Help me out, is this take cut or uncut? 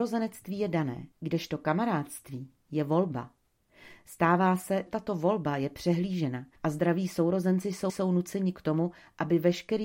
cut